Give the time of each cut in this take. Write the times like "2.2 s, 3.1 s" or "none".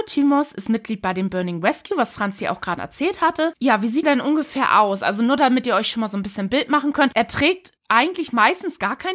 2.8 s, 4.0 s, 7.8 s